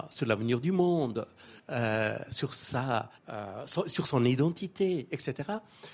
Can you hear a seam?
yes; 2 cuts; at 1.6 s, 3.2 s

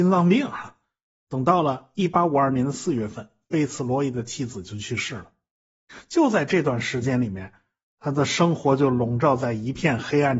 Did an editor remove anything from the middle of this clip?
no; 0 cuts

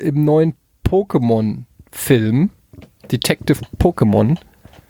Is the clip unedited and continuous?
yes; 0 cuts

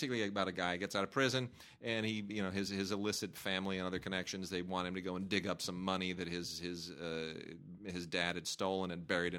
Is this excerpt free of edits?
yes; 0 cuts

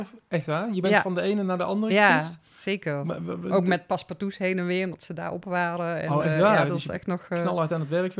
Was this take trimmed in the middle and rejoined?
no; 0 cuts

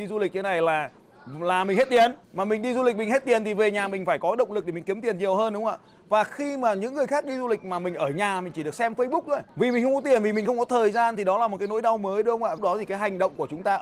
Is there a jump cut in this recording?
yes; 2 cuts; at 2.2 s, 12.6 s

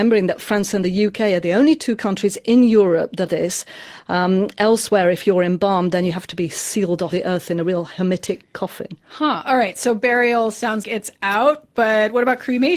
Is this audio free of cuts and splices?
no; 3 cuts; at 3.3 s, 7.1 s, 10.8 s

